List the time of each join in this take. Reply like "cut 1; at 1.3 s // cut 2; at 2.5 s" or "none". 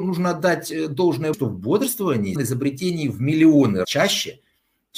cut 1; at 1.3 s // cut 2; at 2.4 s // cut 3; at 3.8 s